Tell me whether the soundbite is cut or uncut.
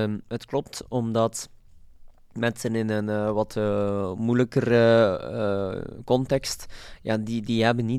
uncut